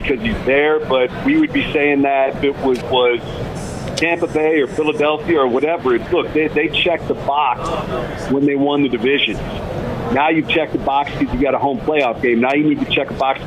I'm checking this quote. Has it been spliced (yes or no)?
yes